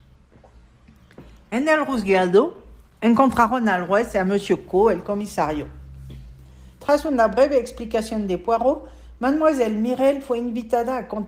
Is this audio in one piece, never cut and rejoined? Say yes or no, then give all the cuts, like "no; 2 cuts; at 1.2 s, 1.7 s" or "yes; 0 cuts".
yes; 0 cuts